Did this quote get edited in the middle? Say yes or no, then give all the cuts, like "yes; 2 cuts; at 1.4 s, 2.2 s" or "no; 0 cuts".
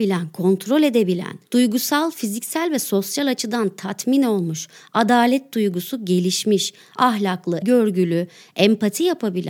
yes; 2 cuts; at 1.4 s, 7.6 s